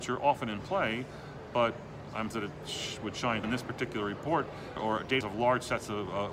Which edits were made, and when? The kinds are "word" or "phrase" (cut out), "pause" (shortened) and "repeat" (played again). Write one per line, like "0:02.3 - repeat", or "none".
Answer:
0:02.3 - word
0:03.4 - word
0:04.8 - word
0:05.2 - word